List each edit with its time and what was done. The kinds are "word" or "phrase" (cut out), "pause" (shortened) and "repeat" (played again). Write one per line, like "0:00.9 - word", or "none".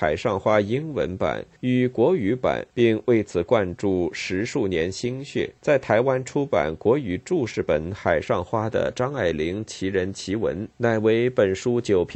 0:01.6 - pause
0:02.7 - pause
0:05.6 - pause
0:10.7 - pause